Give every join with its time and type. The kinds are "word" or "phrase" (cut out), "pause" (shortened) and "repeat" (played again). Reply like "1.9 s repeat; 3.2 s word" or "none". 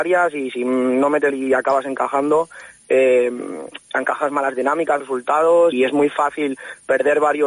1.3 s word; 5.0 s word; 5.7 s word